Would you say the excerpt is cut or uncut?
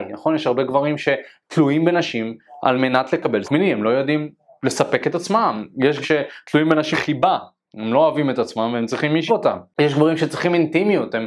cut